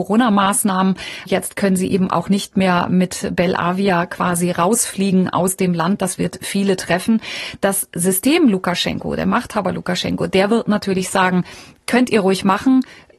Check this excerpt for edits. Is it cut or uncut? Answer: uncut